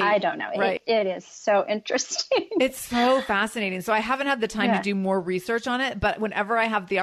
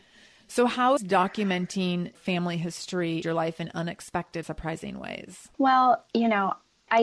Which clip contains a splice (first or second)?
second